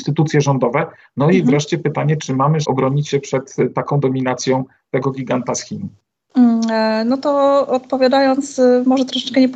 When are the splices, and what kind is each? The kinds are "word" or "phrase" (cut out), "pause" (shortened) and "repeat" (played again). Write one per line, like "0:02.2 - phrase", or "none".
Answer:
0:02.6 - word